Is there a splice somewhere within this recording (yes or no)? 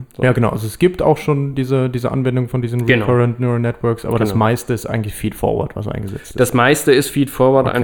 no